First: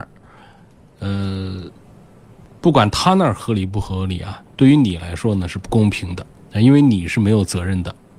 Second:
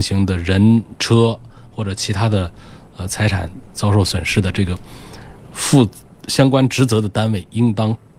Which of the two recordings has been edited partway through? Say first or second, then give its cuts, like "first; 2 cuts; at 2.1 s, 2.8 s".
first; 2 cuts; at 4.5 s, 6.3 s